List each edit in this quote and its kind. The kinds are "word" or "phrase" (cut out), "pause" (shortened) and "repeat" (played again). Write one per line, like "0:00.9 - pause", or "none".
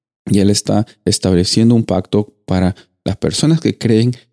none

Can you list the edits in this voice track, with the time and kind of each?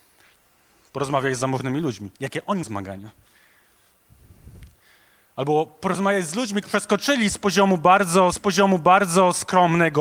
0:02.1 - pause
0:02.6 - word
0:06.6 - phrase
0:08.3 - repeat

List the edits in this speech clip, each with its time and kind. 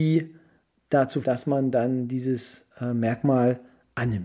0:01.2 - word
0:02.7 - pause

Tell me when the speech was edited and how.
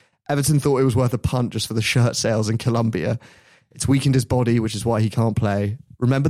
none

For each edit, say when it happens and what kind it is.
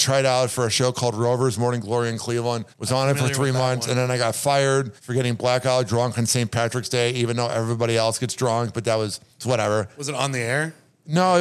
0:02.7 - pause
0:05.0 - pause

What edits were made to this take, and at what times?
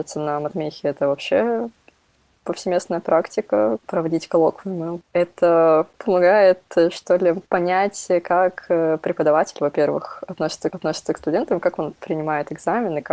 0:03.8 - phrase
0:07.5 - pause
0:10.7 - repeat

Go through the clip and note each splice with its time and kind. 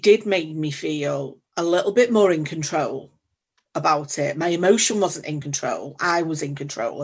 none

